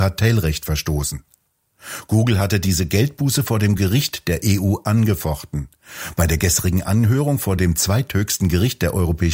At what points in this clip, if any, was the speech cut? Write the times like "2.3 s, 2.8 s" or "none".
none